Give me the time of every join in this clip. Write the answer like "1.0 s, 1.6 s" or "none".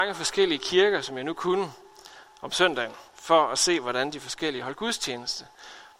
3.1 s